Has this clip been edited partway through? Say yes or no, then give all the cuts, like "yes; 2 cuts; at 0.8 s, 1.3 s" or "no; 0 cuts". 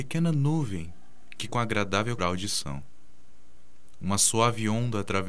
yes; 2 cuts; at 1.5 s, 2.2 s